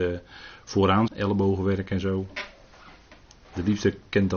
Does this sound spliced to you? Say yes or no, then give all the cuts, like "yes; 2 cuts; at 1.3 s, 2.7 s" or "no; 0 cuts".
yes; 1 cut; at 1.1 s